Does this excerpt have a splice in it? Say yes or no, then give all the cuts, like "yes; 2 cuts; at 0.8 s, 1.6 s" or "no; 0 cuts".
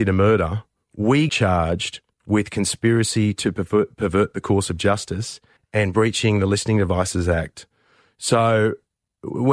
yes; 3 cuts; at 1.3 s, 2.1 s, 5.6 s